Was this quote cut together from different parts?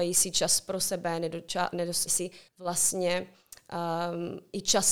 yes; 2 cuts; at 2.1 s, 2.5 s

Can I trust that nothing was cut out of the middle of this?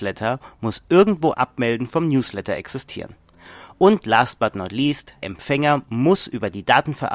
no; 2 cuts; at 1.3 s, 5.2 s

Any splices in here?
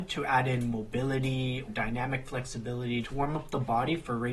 yes; 2 cuts; at 1.7 s, 3.0 s

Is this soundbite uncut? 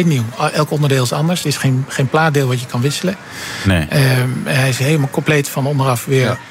yes; 0 cuts

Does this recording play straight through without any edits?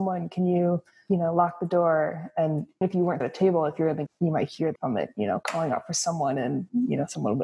no; 4 cuts; at 2.8 s, 3.2 s, 4.1 s, 4.8 s

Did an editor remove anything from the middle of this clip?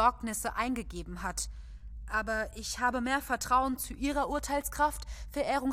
no; 0 cuts

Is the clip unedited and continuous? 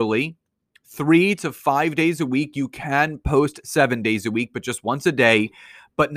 yes; 0 cuts

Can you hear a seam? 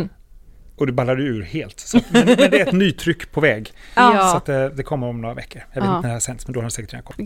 no; 0 cuts

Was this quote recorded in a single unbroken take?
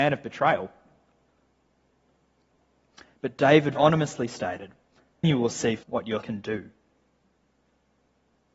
no; 4 cuts; at 3.8 s, 5.2 s, 5.8 s, 6.2 s

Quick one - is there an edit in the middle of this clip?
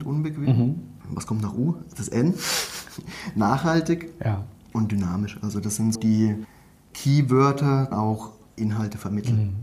yes; 3 cuts; at 1.0 s, 6.0 s, 7.9 s

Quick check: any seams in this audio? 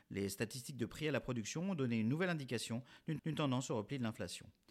yes; 1 cut; at 3.2 s

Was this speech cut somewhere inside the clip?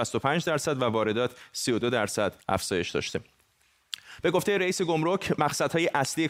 yes; 1 cut; at 2.4 s

